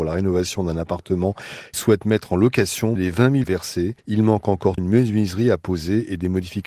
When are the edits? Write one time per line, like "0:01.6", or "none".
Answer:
0:01.7
0:03.0
0:03.4
0:04.8

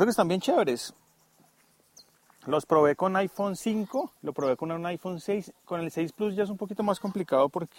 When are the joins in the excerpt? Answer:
0:04.2

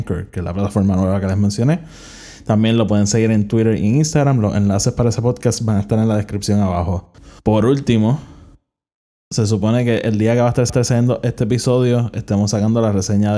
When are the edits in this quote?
0:07.4
0:10.7

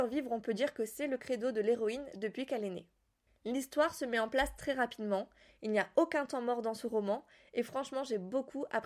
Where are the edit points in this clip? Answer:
none

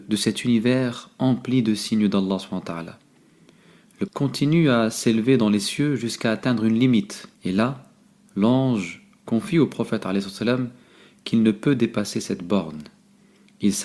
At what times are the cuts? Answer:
0:04.1
0:07.3

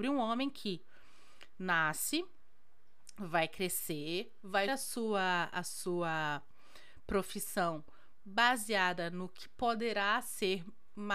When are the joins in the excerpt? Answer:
0:04.7

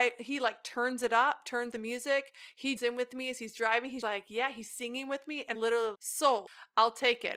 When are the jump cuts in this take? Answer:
0:01.7
0:02.8
0:04.0
0:05.5
0:05.9

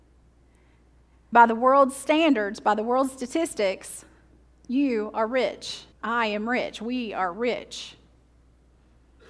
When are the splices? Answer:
0:01.3
0:05.9

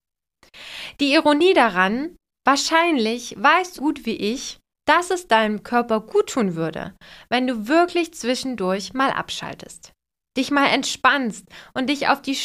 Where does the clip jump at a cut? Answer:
0:03.8

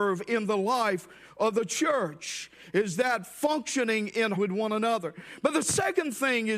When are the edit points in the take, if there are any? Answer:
0:04.3

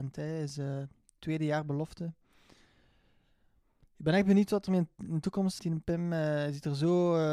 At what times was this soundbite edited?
0:05.6

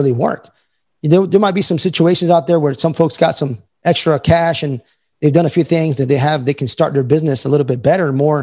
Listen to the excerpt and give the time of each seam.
none

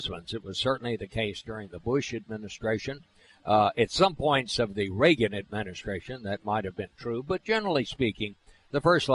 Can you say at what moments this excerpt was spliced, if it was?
none

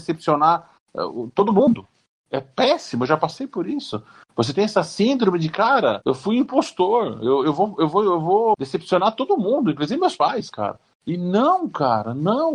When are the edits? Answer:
none

